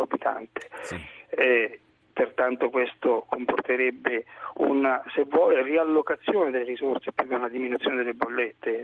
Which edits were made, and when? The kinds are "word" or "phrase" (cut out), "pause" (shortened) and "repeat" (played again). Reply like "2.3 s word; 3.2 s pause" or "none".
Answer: none